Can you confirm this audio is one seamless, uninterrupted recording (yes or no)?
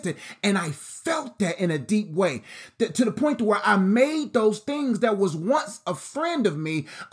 yes